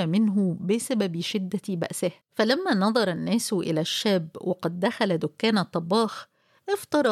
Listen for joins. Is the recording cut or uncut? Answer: cut